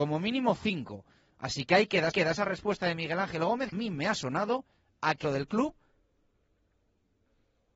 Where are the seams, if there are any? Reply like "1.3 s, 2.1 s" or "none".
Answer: 2.1 s, 3.7 s, 5.2 s